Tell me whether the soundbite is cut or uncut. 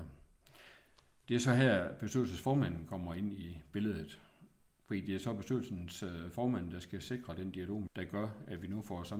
cut